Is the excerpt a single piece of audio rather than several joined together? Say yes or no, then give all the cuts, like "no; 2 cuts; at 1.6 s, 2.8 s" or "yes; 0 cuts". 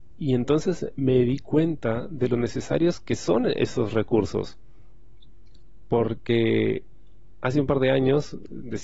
yes; 0 cuts